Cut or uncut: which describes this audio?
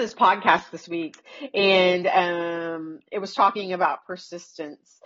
uncut